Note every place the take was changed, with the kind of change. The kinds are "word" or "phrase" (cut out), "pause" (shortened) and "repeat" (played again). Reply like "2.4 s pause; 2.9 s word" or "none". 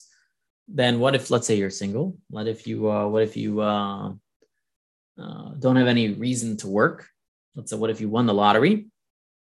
none